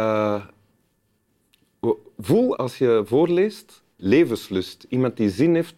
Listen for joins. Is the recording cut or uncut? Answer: cut